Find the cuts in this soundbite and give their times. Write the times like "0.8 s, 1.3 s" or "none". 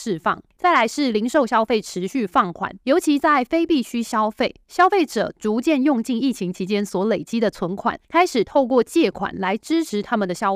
none